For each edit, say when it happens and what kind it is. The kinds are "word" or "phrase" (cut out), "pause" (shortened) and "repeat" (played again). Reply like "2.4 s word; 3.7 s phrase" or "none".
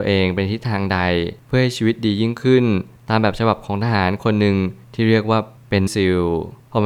5.9 s word